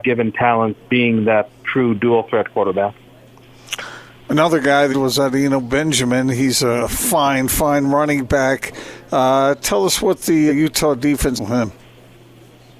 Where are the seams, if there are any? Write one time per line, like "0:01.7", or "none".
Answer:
0:04.9
0:10.5
0:11.4

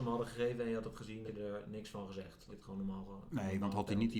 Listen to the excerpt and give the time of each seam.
0:01.3
0:02.5

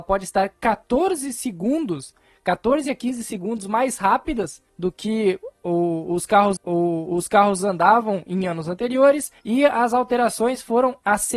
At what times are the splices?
0:04.7
0:06.6
0:09.4

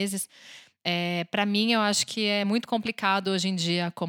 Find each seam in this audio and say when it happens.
none

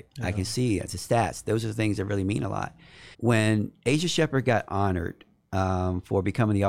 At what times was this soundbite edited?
0:03.1

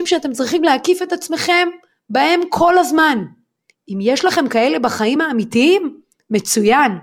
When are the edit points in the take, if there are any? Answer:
none

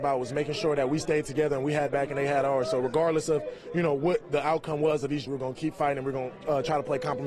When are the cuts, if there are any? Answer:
0:01.9
0:05.3

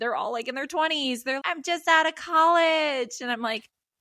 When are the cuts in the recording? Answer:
0:01.4

